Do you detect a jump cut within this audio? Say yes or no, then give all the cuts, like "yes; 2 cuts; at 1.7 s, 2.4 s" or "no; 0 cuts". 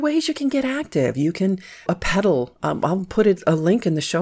yes; 1 cut; at 1.9 s